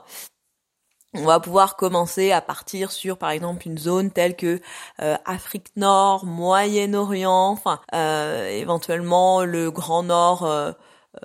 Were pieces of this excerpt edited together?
yes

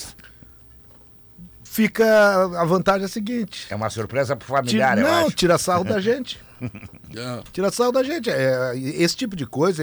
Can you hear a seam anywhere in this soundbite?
no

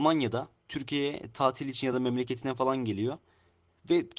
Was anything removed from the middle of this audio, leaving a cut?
no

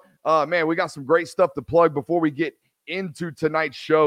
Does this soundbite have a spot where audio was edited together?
no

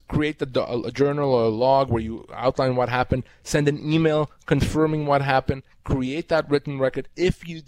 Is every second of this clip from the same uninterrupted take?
yes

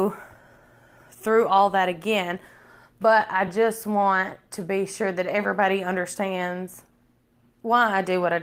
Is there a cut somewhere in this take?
no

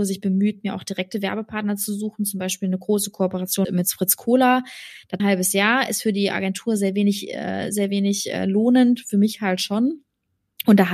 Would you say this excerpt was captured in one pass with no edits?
no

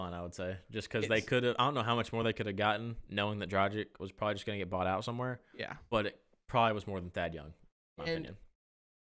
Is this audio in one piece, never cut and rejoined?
yes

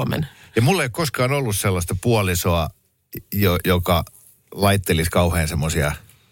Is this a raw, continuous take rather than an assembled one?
yes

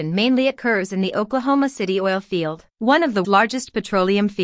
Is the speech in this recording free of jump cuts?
no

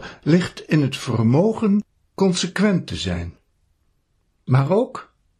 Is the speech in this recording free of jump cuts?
yes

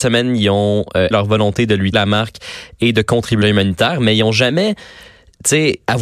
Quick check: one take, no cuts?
no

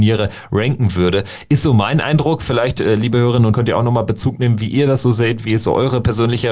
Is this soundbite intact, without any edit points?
no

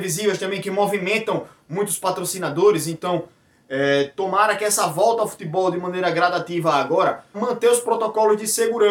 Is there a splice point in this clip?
yes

